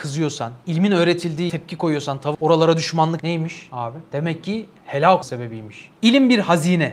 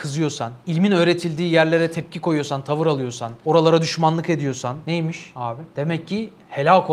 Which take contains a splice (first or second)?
first